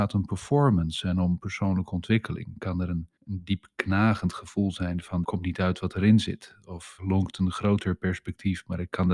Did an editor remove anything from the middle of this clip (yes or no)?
yes